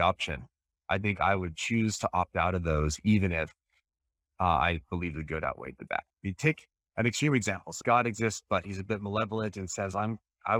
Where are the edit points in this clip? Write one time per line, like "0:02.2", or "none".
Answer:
0:06.1